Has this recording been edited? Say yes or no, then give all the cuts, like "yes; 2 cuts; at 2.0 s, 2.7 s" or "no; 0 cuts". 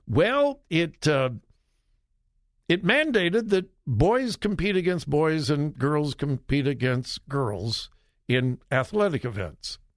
no; 0 cuts